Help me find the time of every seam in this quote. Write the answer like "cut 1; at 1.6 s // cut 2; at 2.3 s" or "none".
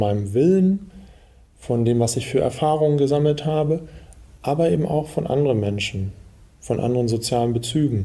none